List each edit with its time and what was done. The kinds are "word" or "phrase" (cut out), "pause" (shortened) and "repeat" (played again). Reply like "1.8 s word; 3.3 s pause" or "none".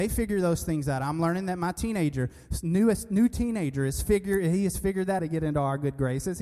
5.2 s phrase